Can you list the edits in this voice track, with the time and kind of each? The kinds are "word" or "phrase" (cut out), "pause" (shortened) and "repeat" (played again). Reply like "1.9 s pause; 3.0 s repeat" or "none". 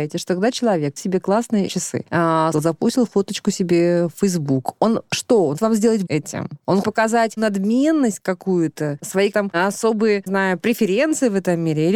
1.0 s word; 1.7 s word; 2.5 s word; 5.6 s word; 6.1 s word; 6.8 s word; 7.4 s word; 9.3 s word; 10.3 s word